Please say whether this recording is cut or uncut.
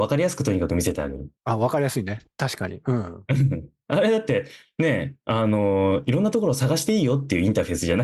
cut